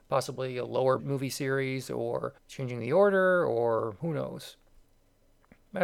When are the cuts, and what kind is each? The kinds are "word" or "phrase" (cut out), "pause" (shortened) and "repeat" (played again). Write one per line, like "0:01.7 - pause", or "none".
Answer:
0:01.0 - word
0:02.4 - pause